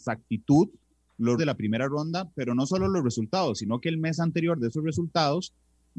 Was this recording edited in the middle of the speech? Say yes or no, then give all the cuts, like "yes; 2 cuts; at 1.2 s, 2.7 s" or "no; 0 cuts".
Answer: yes; 1 cut; at 1.4 s